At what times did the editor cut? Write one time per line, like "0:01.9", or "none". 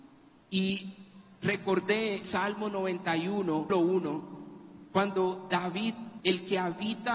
0:02.2
0:03.7
0:06.2